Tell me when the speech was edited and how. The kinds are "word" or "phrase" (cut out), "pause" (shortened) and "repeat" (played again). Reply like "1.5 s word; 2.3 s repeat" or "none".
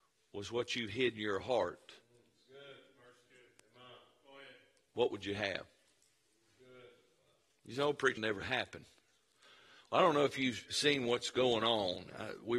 8.2 s word